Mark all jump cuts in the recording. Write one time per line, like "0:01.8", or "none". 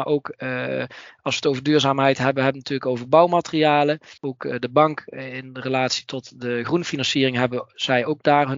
0:04.2